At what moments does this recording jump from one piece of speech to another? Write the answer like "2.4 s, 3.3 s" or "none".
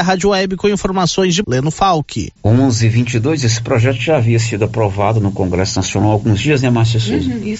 1.4 s, 2.4 s